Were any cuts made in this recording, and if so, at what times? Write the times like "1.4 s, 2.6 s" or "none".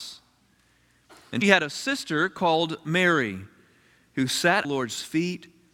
1.4 s, 4.6 s